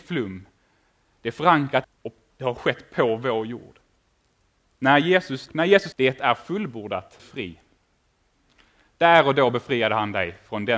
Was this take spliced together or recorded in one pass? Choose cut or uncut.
cut